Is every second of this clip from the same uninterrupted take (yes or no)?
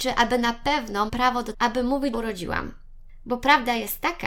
no